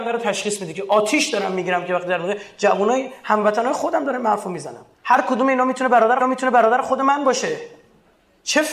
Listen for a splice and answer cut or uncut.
cut